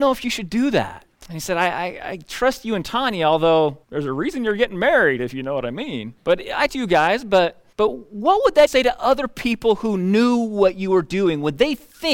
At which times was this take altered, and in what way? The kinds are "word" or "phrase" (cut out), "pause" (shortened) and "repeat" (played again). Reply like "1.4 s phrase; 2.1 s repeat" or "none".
1.1 s pause; 3.8 s pause; 6.2 s pause; 6.7 s word; 7.7 s pause; 8.7 s word